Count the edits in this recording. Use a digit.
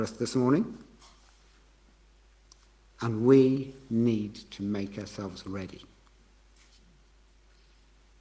0